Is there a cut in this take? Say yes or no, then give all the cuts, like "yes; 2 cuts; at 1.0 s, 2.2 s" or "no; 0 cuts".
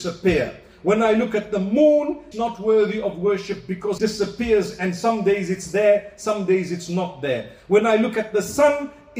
yes; 2 cuts; at 2.3 s, 4.0 s